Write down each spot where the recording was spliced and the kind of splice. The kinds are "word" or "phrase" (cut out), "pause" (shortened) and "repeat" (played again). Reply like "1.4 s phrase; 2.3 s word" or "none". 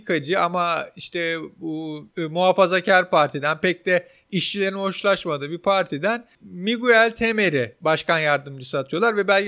2.1 s pause